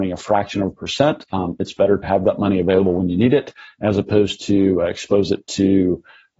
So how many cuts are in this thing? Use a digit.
1